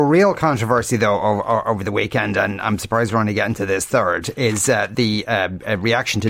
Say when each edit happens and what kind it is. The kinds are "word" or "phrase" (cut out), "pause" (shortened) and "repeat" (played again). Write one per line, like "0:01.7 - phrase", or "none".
none

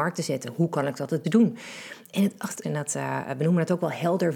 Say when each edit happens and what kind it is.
0:01.2 - word
0:02.6 - phrase

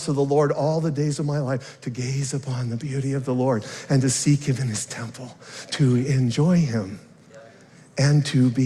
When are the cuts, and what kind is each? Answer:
none

